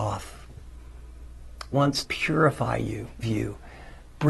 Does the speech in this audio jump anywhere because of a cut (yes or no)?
yes